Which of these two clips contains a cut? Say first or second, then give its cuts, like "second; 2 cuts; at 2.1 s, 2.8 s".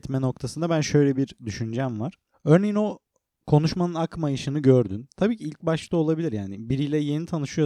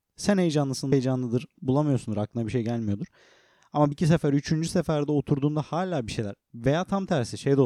second; 3 cuts; at 0.9 s, 1.6 s, 3.9 s